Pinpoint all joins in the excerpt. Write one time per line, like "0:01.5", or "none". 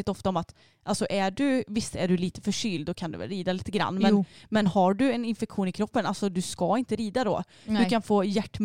none